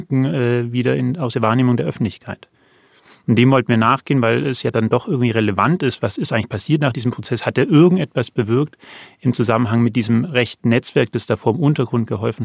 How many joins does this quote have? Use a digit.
0